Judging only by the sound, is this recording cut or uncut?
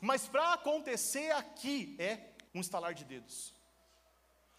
cut